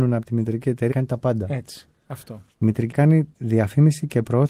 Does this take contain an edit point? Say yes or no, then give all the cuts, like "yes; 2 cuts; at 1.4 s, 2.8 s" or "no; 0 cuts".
yes; 4 cuts; at 0.9 s, 2.5 s, 2.9 s, 3.3 s